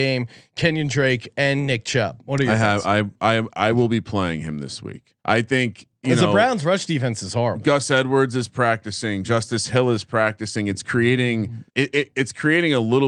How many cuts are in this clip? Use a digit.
2